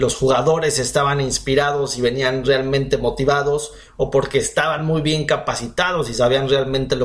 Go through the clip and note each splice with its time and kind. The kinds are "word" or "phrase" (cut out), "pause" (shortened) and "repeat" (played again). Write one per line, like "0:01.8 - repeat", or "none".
none